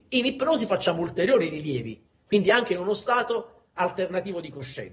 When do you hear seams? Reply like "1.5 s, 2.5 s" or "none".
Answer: none